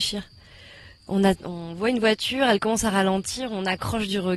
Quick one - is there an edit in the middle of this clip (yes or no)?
no